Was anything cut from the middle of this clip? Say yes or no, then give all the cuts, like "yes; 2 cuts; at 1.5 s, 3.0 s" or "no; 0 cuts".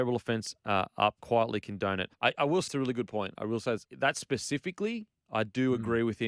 yes; 4 cuts; at 1.2 s, 2.1 s, 2.7 s, 3.8 s